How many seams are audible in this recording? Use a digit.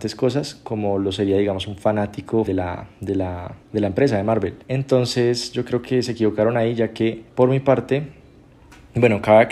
4